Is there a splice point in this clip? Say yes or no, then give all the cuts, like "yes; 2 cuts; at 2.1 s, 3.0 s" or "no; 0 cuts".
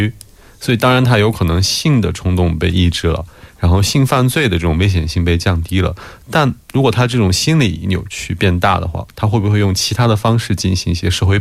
yes; 1 cut; at 6.6 s